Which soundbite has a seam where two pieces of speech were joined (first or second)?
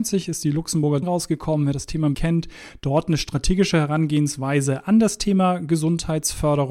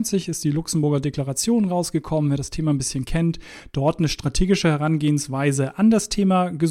first